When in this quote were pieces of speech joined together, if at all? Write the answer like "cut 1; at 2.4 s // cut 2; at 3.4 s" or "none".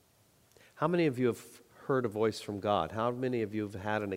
none